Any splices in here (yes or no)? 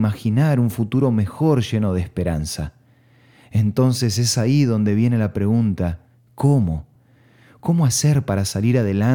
no